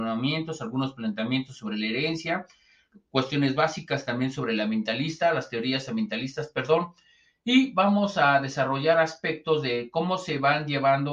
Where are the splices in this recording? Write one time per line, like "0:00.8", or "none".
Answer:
none